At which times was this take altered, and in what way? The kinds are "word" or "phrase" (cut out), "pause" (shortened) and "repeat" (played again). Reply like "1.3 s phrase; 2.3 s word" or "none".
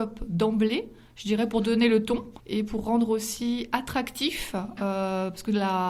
2.4 s pause